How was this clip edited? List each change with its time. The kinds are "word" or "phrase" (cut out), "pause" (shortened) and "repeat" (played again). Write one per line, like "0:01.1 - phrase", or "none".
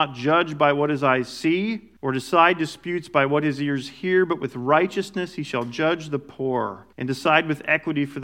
0:02.0 - pause
0:06.9 - pause